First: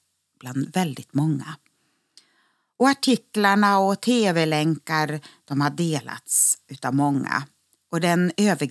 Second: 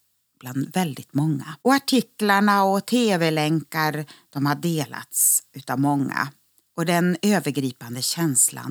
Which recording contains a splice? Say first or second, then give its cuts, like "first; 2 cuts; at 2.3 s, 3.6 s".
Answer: second; 1 cut; at 1.6 s